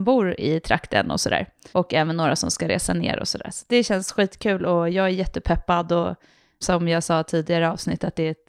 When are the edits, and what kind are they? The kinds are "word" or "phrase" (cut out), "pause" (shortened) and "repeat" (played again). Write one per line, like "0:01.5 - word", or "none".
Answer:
0:01.7 - pause
0:06.6 - word

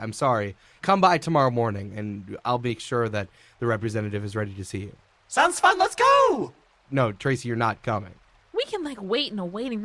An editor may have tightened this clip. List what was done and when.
none

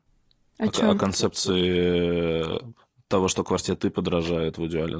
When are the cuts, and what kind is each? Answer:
0:02.8 - pause

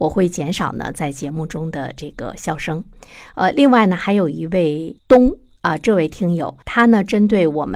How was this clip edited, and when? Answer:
0:05.0 - pause
0:06.6 - pause

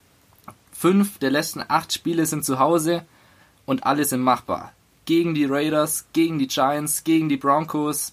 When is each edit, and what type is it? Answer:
none

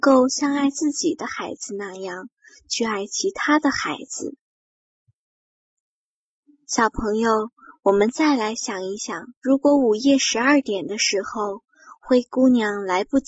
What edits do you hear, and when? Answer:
0:09.4 - pause

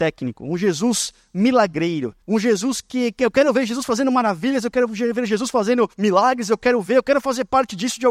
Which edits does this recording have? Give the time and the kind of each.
0:02.2 - pause
0:05.9 - pause

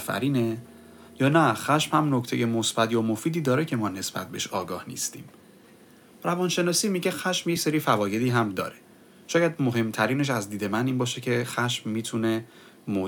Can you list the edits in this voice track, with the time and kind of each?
none

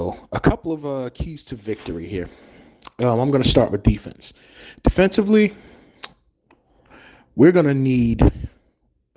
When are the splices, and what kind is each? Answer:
none

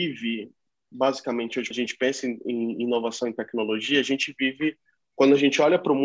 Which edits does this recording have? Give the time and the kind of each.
0:01.7 - word

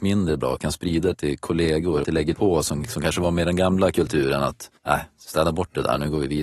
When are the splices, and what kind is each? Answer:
0:01.1 - word
0:02.0 - phrase
0:02.3 - word
0:04.8 - pause

